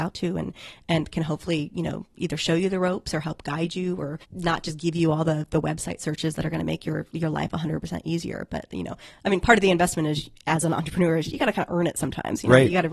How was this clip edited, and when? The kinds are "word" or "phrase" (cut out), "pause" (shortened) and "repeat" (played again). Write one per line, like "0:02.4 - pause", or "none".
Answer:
none